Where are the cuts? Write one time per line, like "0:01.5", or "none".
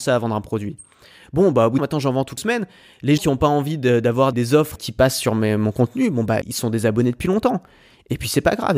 0:01.8
0:02.4
0:03.2
0:04.3
0:04.8
0:06.4